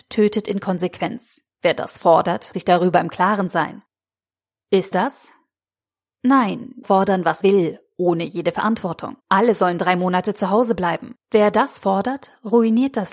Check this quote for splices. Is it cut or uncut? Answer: cut